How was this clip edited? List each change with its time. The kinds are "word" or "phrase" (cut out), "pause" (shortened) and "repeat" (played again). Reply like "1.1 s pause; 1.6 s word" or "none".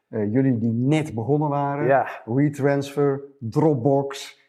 none